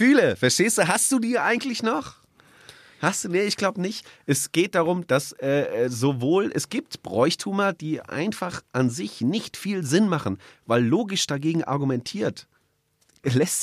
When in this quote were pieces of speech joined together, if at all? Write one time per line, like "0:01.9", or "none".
none